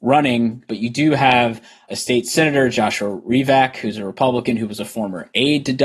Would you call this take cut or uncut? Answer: uncut